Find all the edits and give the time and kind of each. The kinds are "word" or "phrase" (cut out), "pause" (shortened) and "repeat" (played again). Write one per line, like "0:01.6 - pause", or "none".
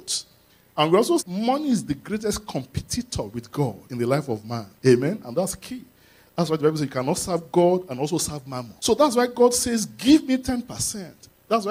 0:01.2 - word
0:03.9 - pause
0:04.8 - pause
0:08.8 - pause